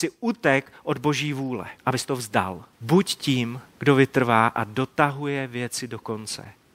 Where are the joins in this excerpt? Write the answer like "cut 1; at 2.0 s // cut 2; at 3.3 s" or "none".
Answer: cut 1; at 1.8 s // cut 2; at 2.7 s // cut 3; at 3.7 s